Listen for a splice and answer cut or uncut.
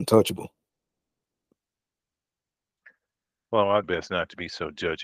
cut